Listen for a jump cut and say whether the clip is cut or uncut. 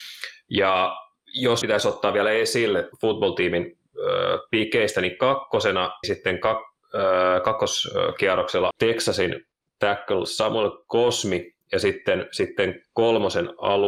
cut